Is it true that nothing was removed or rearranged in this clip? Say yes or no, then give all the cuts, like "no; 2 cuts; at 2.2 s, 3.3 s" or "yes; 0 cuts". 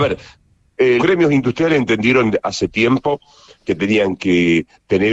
no; 1 cut; at 1.0 s